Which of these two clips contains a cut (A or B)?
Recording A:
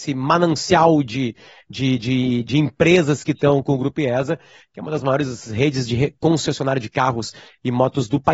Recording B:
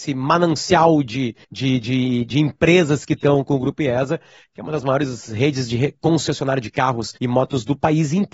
B